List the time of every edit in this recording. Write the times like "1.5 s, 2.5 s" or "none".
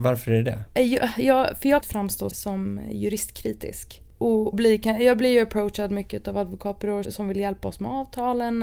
1.8 s, 2.3 s, 4.5 s, 7.0 s

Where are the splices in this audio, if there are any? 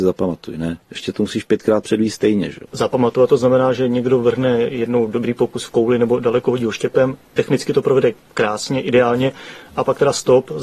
none

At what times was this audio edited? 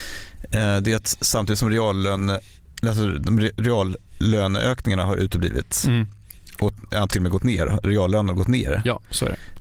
7.1 s

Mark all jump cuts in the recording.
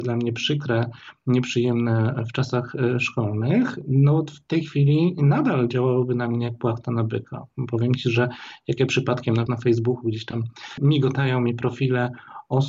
9.5 s

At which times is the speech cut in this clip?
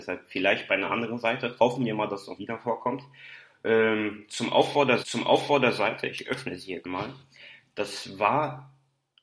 2.4 s, 5.0 s, 6.8 s

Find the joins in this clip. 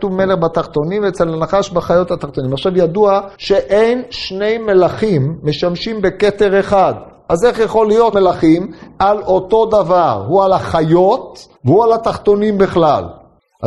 3.3 s, 8.1 s, 11.6 s

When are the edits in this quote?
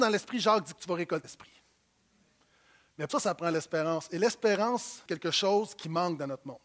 1.2 s, 3.1 s, 5.1 s

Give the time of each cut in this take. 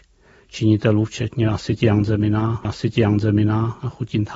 2.6 s

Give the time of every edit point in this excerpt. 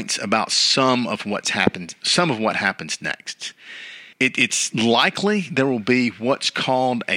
4.1 s

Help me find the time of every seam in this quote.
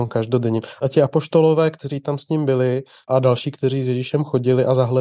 none

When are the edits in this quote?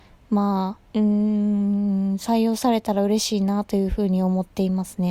0.9 s

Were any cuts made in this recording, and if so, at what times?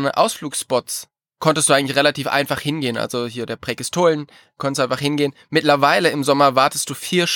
none

